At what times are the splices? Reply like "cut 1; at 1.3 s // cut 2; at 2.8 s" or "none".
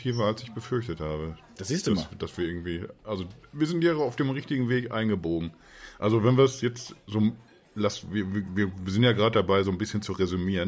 none

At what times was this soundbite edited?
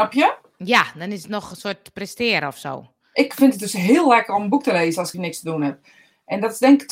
cut 1; at 5.1 s

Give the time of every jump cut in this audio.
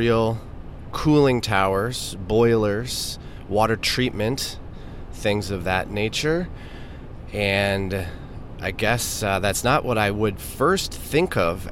none

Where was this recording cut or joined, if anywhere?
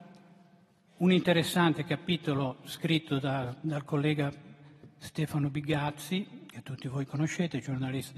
none

